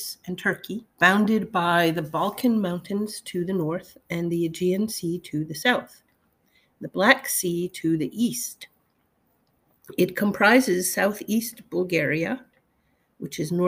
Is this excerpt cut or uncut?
cut